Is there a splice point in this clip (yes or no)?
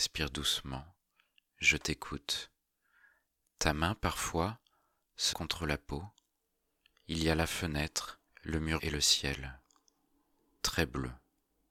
yes